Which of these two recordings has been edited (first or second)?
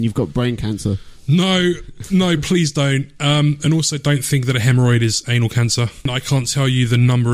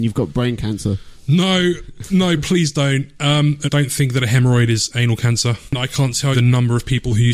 second